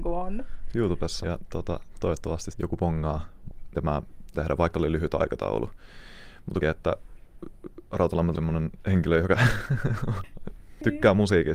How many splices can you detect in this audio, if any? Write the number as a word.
seven